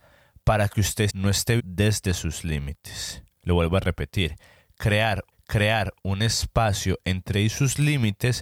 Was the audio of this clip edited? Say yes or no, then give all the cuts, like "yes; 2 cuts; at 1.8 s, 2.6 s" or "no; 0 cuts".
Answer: yes; 5 cuts; at 1.1 s, 1.6 s, 3.3 s, 5.3 s, 7.3 s